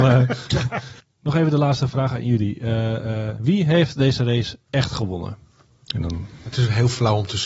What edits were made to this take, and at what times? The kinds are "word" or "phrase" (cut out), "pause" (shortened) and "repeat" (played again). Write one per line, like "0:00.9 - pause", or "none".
none